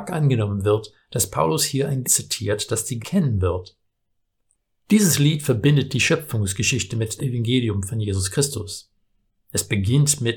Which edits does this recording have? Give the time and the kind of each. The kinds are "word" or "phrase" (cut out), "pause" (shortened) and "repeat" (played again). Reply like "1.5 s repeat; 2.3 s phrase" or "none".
2.0 s word; 3.0 s word; 7.2 s word